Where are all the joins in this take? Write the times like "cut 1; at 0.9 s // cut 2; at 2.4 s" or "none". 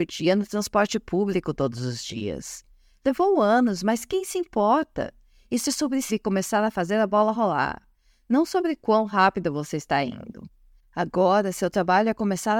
cut 1; at 6.1 s